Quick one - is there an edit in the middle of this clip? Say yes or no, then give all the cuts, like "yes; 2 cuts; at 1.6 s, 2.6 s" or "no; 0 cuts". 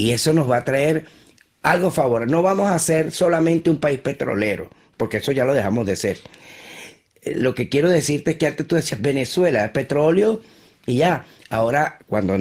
no; 0 cuts